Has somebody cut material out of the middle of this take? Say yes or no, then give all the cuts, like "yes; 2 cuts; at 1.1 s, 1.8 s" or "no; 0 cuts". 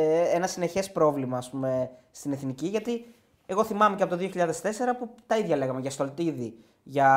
no; 0 cuts